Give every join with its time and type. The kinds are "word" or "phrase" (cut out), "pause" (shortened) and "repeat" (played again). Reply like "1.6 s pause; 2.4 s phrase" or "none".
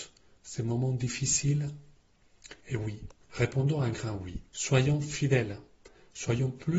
2.6 s pause; 3.2 s pause; 4.5 s pause